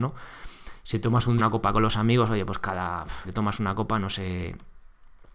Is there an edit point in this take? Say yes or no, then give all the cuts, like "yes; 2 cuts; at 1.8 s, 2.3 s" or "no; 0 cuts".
yes; 2 cuts; at 1.4 s, 3.2 s